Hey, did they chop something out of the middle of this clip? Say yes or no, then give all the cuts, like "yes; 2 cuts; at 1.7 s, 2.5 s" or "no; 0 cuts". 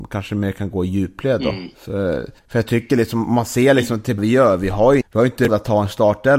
yes; 4 cuts; at 2.4 s, 4.2 s, 5.0 s, 5.5 s